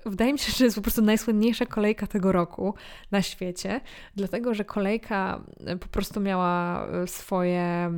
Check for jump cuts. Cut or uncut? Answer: uncut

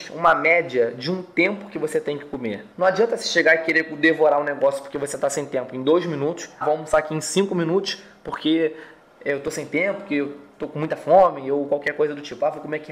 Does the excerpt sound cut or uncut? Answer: cut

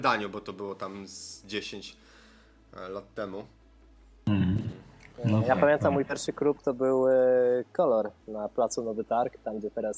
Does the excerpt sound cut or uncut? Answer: uncut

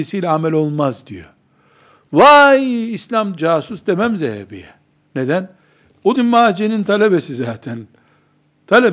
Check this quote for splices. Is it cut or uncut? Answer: cut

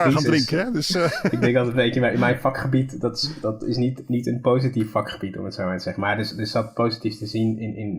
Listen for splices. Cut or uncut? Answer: uncut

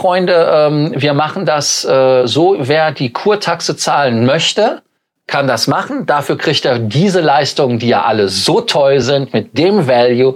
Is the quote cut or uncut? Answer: uncut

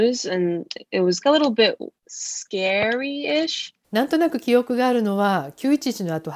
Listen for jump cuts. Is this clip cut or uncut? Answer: cut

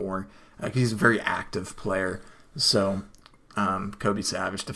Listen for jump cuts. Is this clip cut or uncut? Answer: uncut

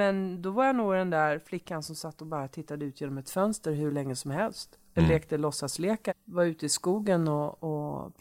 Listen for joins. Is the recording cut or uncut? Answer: cut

